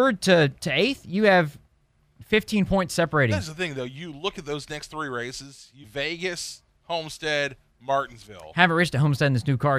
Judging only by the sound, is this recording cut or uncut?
cut